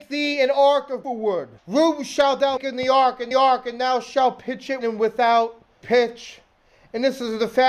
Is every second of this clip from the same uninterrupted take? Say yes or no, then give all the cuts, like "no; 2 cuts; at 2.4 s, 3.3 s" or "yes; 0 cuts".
no; 6 cuts; at 1.0 s, 1.6 s, 2.6 s, 3.3 s, 4.8 s, 5.8 s